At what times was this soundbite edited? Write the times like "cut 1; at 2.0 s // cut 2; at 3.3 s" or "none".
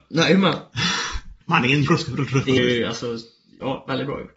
cut 1; at 1.4 s // cut 2; at 1.9 s // cut 3; at 2.6 s